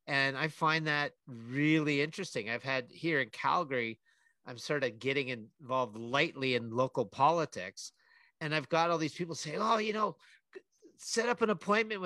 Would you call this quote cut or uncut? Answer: cut